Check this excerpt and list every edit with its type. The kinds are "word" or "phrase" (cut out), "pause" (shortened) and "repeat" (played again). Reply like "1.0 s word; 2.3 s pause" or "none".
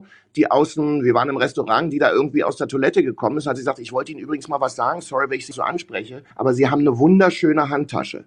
5.5 s word; 6.3 s pause